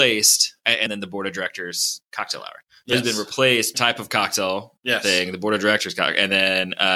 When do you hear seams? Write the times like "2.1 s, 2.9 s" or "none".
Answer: 2.1 s, 3.7 s